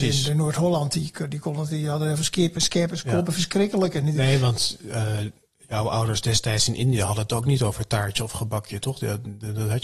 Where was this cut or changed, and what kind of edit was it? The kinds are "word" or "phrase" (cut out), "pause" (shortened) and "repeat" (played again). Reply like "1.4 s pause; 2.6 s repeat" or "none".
none